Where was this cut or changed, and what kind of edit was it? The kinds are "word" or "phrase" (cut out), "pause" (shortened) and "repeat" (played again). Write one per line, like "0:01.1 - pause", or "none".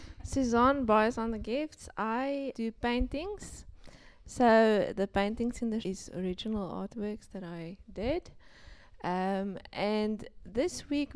0:02.5 - word
0:05.8 - word